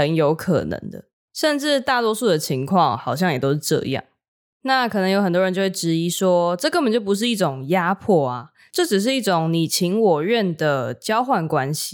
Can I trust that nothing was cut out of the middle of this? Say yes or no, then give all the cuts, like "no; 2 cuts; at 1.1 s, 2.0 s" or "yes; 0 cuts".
yes; 0 cuts